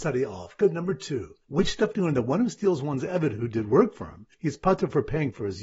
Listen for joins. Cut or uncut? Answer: cut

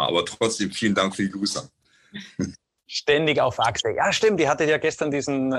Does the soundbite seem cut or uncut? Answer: uncut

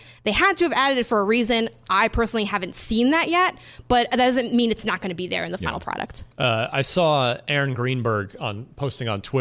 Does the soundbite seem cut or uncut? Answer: cut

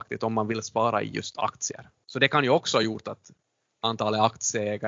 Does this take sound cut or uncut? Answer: uncut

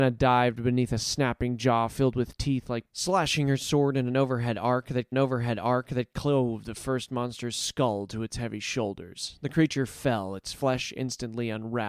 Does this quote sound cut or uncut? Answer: cut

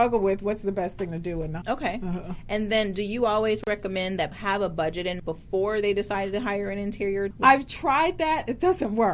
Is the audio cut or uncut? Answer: cut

